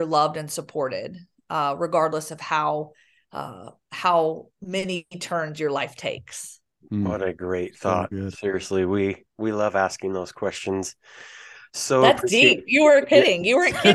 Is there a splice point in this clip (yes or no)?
no